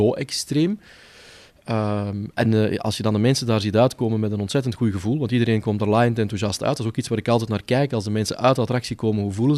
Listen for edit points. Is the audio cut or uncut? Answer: uncut